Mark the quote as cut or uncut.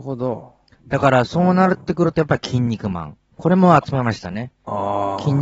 cut